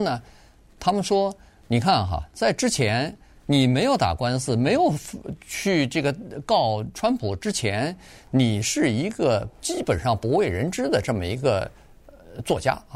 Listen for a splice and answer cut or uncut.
uncut